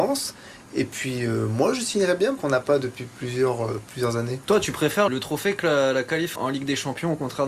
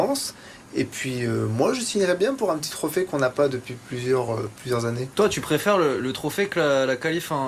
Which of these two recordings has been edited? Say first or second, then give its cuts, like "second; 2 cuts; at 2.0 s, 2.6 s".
first; 3 cuts; at 2.4 s, 5.1 s, 6.4 s